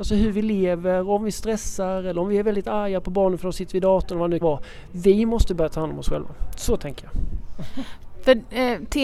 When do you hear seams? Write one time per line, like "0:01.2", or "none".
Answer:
0:04.4